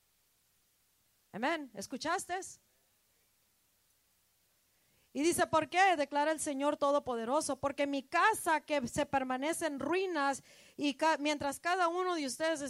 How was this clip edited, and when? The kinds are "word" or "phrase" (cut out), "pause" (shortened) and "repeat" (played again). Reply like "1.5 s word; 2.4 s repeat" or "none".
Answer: none